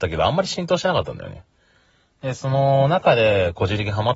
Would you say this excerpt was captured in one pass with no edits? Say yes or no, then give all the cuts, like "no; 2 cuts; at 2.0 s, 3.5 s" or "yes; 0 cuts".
yes; 0 cuts